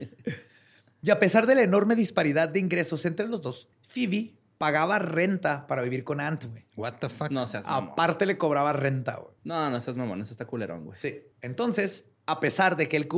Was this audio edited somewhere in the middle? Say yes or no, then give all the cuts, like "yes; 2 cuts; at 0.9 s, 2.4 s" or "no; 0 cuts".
yes; 3 cuts; at 3.7 s, 9.4 s, 11.3 s